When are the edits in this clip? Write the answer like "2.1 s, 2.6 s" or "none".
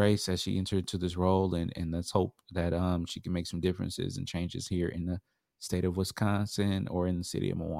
none